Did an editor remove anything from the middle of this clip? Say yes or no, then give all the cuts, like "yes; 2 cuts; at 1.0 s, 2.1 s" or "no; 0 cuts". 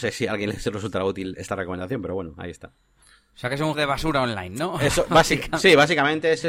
yes; 1 cut; at 3.7 s